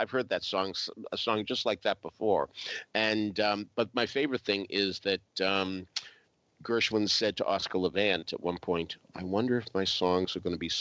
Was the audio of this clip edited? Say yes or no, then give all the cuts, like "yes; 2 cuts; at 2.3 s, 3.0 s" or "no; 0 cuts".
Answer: no; 0 cuts